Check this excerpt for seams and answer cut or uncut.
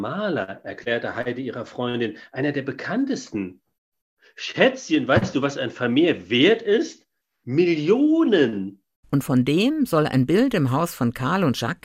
uncut